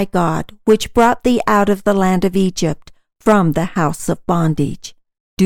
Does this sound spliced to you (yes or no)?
no